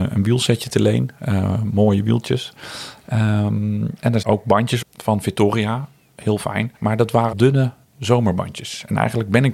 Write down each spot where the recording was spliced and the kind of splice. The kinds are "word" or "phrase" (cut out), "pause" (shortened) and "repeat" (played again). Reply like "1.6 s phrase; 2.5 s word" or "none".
4.2 s word; 4.8 s word; 6.8 s pause; 7.3 s word